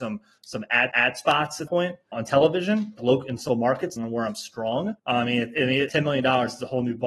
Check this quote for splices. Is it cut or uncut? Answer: cut